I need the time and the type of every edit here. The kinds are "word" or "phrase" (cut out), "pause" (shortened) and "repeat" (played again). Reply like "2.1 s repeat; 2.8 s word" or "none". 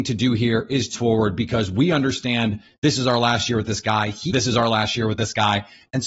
0.9 s word; 4.3 s word